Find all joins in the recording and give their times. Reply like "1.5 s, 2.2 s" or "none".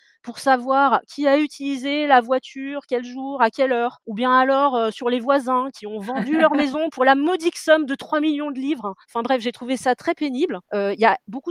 9.0 s